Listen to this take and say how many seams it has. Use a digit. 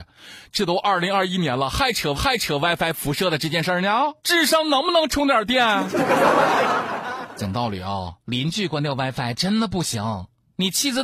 3